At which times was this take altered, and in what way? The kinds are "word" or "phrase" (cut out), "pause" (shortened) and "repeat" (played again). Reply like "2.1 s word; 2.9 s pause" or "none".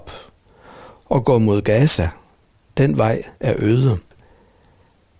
none